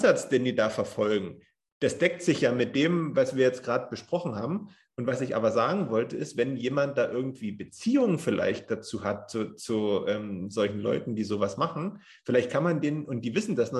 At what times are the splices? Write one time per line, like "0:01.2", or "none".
none